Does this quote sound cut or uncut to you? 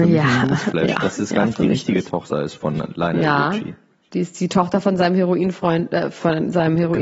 uncut